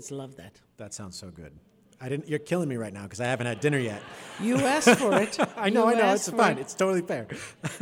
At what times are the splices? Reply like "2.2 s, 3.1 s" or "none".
none